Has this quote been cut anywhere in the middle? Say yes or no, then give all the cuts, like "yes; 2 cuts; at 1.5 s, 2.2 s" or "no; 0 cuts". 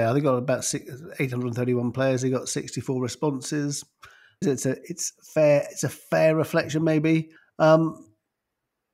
yes; 2 cuts; at 4.4 s, 7.4 s